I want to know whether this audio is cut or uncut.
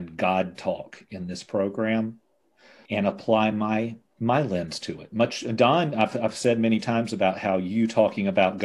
uncut